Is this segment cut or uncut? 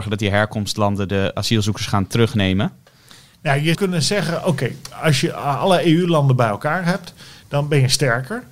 cut